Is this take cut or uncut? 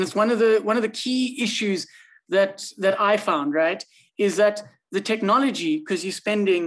uncut